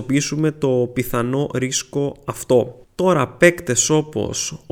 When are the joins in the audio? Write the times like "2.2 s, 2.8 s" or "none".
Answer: 2.8 s

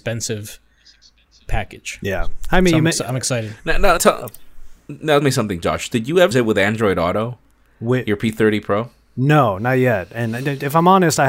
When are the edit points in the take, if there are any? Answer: 4.0 s, 5.2 s, 6.3 s

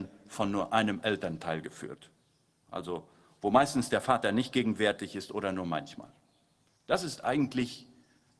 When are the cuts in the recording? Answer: none

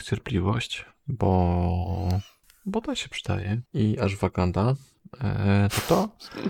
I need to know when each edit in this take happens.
3.7 s

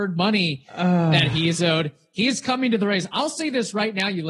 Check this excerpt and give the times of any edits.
none

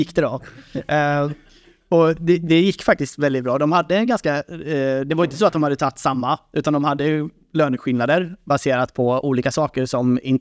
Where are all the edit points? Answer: none

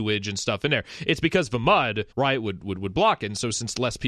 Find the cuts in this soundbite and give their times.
2.1 s

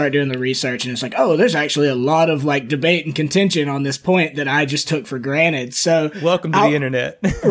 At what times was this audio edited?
none

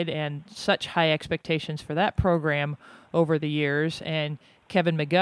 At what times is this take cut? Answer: none

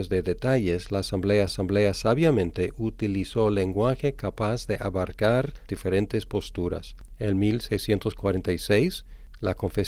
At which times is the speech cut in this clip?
1.5 s, 5.7 s

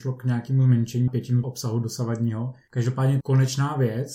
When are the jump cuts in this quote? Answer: 1.1 s, 1.4 s, 3.2 s

